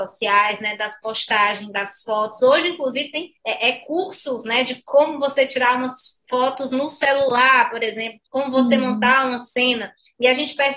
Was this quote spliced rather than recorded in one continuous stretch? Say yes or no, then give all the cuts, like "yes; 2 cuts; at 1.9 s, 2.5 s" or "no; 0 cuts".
yes; 2 cuts; at 3.4 s, 8.3 s